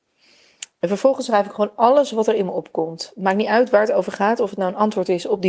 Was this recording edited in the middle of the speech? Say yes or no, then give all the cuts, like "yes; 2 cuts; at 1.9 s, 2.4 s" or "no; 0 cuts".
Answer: no; 0 cuts